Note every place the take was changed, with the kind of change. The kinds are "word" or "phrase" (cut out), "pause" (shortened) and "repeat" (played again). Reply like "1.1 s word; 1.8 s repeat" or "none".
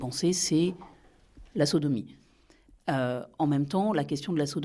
none